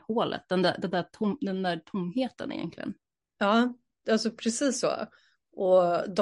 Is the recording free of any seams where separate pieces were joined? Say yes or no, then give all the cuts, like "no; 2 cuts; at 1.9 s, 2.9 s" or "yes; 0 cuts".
yes; 0 cuts